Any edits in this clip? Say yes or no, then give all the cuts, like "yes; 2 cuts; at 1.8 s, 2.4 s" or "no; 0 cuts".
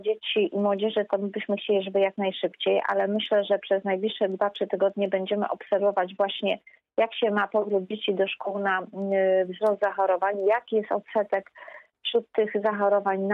no; 0 cuts